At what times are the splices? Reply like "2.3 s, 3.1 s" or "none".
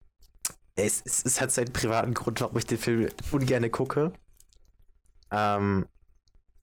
none

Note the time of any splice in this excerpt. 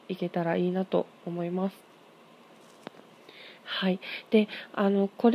3.6 s

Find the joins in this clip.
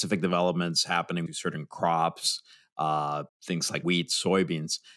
1.3 s, 3.3 s, 3.8 s

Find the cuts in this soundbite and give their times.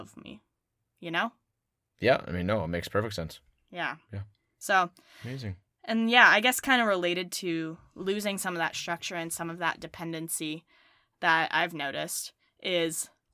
none

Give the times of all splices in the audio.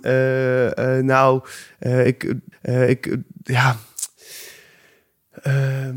2.5 s

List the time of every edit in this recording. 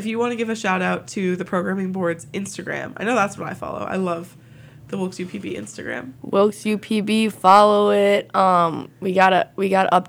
6.2 s

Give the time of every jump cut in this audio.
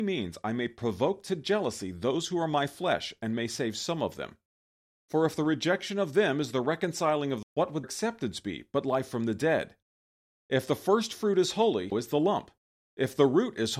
7.4 s, 7.8 s, 11.9 s

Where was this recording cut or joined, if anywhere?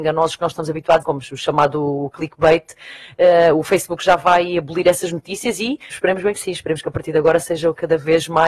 1.0 s, 5.9 s

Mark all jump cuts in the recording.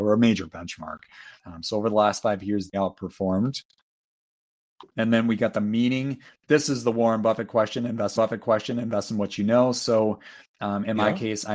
1.4 s, 2.7 s, 4.9 s, 8.2 s

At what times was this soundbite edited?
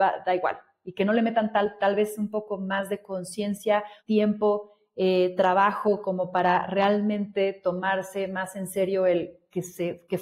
4.0 s

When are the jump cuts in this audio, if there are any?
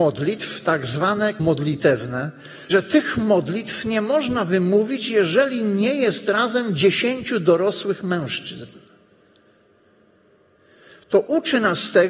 1.4 s, 2.7 s

